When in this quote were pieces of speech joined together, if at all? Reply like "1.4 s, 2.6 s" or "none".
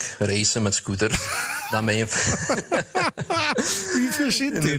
none